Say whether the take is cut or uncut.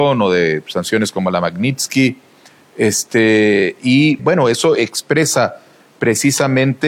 cut